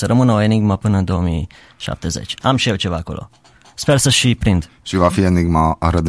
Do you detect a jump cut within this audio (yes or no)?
no